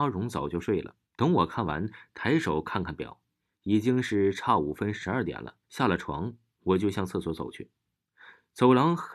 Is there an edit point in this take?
yes; 2 cuts; at 1.0 s, 5.6 s

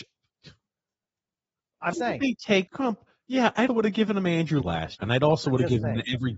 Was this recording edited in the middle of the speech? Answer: yes; 5 cuts; at 1.9 s, 2.7 s, 3.7 s, 4.6 s, 5.0 s

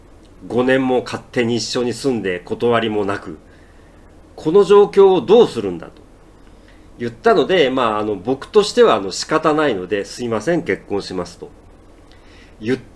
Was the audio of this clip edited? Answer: no; 0 cuts

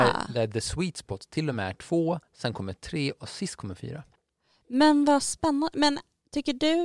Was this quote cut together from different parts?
no; 0 cuts

